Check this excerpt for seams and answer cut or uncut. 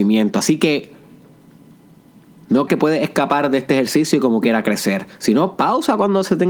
cut